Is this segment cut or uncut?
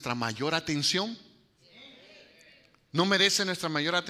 uncut